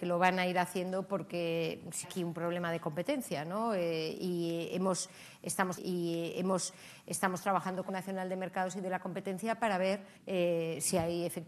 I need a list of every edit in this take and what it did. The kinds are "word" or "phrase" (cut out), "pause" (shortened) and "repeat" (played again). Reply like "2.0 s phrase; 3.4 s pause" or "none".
2.0 s phrase; 5.8 s repeat; 7.9 s phrase; 10.2 s pause